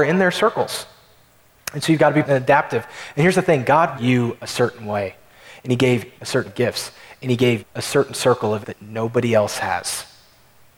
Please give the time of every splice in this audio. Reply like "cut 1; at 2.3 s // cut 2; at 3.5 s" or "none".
cut 1; at 2.2 s // cut 2; at 4.0 s // cut 3; at 6.2 s // cut 4; at 6.5 s // cut 5; at 7.6 s // cut 6; at 8.6 s